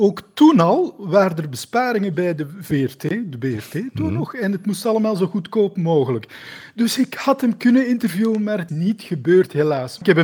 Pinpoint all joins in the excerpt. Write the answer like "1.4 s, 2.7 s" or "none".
8.7 s